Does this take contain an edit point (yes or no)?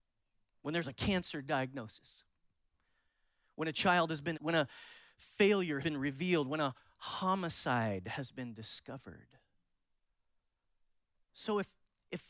yes